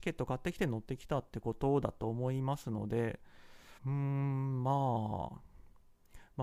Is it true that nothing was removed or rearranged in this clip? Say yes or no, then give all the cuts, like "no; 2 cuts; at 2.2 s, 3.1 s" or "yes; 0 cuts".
no; 1 cut; at 3.8 s